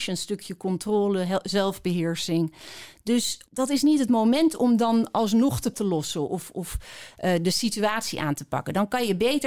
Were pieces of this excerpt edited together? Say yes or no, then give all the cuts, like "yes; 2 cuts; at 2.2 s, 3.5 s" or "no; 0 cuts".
yes; 2 cuts; at 3.5 s, 5.7 s